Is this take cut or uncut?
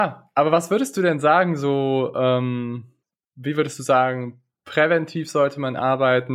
cut